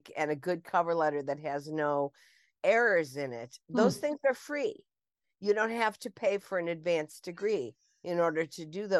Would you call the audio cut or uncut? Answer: uncut